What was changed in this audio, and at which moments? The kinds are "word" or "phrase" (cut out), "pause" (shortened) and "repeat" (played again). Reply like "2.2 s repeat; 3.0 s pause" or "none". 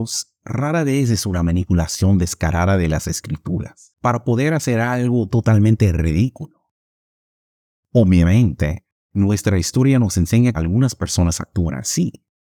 10.5 s word